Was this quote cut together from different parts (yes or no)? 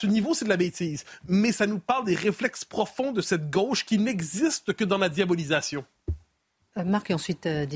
no